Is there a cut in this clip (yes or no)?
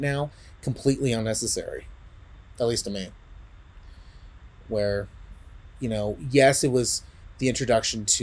no